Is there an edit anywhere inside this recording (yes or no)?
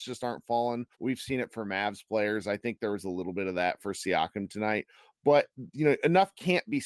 yes